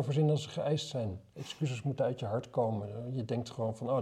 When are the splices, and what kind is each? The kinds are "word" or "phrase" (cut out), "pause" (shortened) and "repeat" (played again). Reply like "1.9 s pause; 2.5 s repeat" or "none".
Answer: none